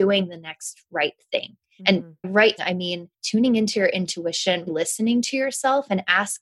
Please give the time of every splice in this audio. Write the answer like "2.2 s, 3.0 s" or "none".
2.2 s, 2.6 s, 3.1 s, 4.7 s